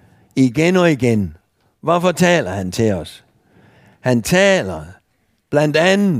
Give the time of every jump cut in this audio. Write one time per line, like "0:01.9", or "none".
none